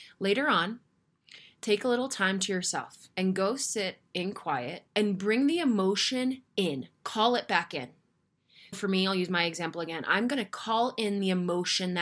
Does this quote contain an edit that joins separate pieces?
yes; 4 cuts; at 3.1 s, 4.9 s, 6.5 s, 8.7 s

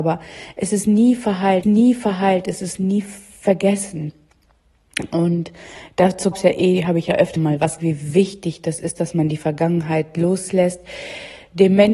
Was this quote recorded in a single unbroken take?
no; 4 cuts; at 1.6 s, 6.3 s, 7.4 s, 7.8 s

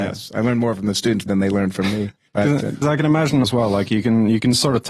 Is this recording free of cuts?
no; 4 cuts; at 1.3 s, 2.3 s, 2.8 s, 3.4 s

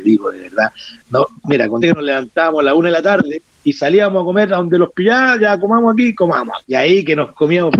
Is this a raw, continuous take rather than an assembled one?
no; 2 cuts; at 1.8 s, 6.6 s

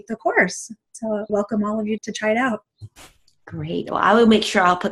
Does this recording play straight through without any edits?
no; 2 cuts; at 1.3 s, 2.0 s

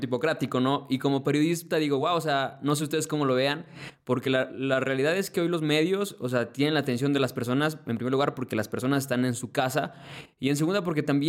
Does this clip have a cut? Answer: no; 0 cuts

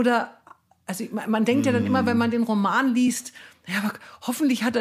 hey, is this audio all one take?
yes; 0 cuts

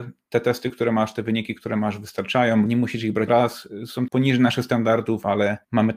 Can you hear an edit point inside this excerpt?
yes; 3 cuts; at 2.7 s, 3.3 s, 4.1 s

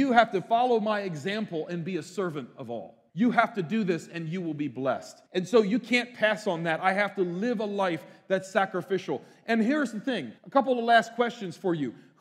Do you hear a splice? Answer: yes; 3 cuts; at 3.1 s, 5.3 s, 10.4 s

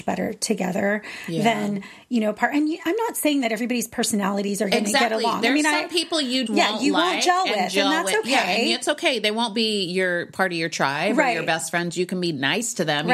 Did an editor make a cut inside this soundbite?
yes; 1 cut; at 6.5 s

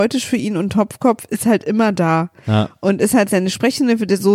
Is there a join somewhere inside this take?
no; 0 cuts

